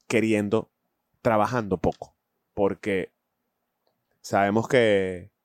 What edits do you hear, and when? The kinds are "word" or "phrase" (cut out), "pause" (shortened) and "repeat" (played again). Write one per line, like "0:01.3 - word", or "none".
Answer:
0:01.1 - word